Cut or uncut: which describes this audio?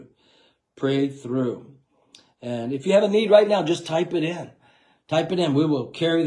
uncut